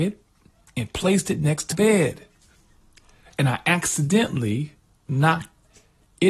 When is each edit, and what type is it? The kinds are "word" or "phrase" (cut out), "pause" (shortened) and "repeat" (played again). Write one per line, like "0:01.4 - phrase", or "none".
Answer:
0:01.7 - word